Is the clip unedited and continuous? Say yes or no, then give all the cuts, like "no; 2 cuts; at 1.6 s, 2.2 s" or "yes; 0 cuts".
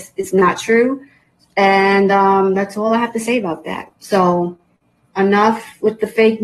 yes; 0 cuts